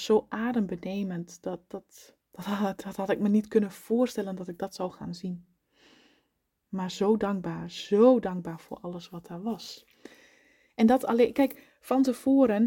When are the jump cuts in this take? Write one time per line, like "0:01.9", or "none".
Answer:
0:02.2